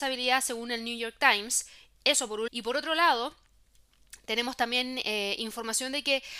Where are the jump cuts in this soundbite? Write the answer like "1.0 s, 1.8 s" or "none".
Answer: 2.5 s